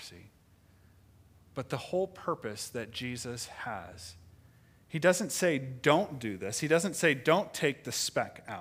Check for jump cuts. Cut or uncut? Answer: uncut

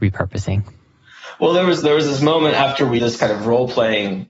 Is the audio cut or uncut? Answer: cut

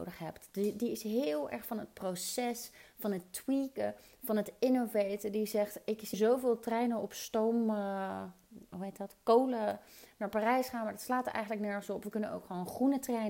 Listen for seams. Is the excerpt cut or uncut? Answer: cut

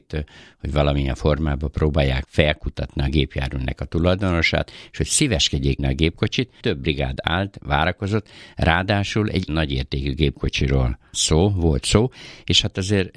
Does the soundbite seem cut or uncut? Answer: cut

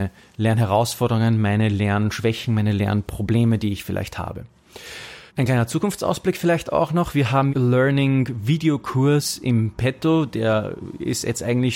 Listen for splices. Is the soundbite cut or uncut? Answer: cut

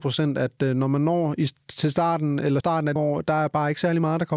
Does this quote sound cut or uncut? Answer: cut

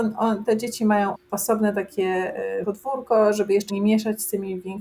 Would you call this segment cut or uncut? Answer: cut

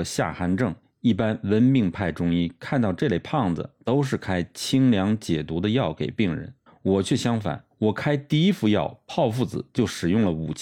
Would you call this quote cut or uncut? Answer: uncut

